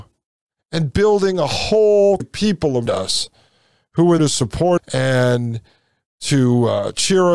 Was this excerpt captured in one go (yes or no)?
no